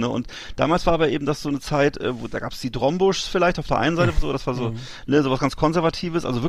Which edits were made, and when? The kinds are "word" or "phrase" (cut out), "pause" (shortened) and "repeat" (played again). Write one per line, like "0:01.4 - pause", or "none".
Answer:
none